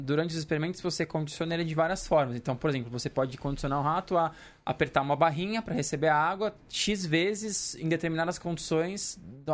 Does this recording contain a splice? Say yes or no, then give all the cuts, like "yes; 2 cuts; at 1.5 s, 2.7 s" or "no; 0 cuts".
no; 0 cuts